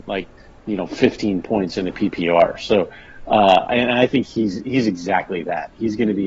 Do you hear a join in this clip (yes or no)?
no